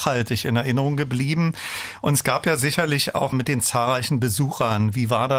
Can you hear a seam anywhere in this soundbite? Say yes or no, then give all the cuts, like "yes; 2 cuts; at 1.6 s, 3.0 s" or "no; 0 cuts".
yes; 1 cut; at 3.3 s